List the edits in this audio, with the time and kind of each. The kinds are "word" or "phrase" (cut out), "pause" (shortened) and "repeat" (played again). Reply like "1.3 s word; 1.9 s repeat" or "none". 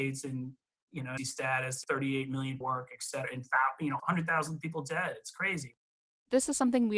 1.2 s word; 1.8 s word; 2.6 s phrase; 4.0 s phrase

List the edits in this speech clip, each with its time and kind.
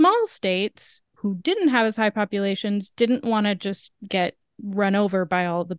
none

